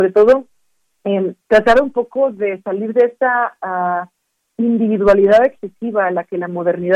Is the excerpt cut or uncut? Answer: cut